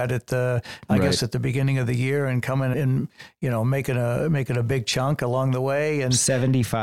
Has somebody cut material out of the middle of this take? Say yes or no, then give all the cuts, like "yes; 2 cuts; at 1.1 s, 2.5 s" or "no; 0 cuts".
yes; 1 cut; at 2.7 s